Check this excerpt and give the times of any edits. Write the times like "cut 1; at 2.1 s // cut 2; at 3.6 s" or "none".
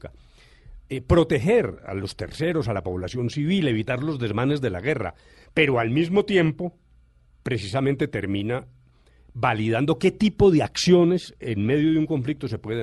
none